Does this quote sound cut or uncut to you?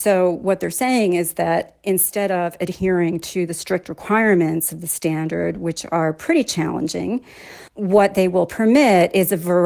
cut